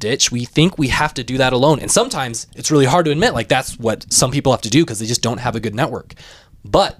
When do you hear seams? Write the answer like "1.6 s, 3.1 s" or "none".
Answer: none